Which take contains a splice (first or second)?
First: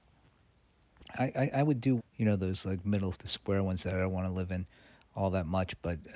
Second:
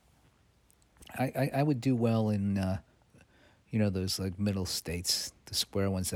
first